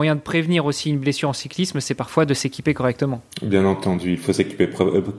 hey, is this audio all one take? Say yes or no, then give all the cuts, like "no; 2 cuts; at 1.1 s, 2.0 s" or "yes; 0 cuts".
yes; 0 cuts